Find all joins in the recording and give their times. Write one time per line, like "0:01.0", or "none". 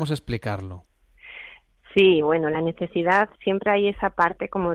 none